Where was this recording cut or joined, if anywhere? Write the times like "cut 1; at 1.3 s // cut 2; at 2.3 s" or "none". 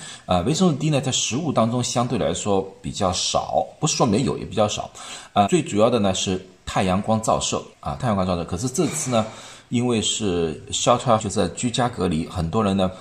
cut 1; at 5.5 s // cut 2; at 7.7 s // cut 3; at 11.2 s